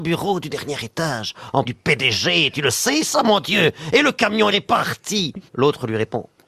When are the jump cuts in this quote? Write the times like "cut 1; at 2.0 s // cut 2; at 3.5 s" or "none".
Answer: cut 1; at 1.6 s // cut 2; at 4.5 s // cut 3; at 5.5 s